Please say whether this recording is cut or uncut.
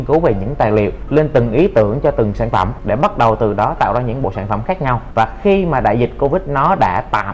uncut